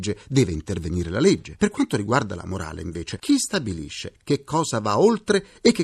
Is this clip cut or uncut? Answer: uncut